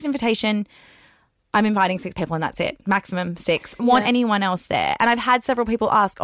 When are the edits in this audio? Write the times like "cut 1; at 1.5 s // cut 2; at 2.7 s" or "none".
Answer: cut 1; at 3.8 s